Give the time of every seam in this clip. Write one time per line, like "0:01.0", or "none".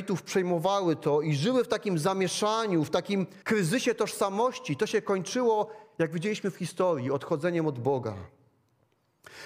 0:03.4